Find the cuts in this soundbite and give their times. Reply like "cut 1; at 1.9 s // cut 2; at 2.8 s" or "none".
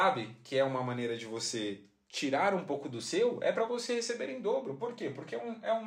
none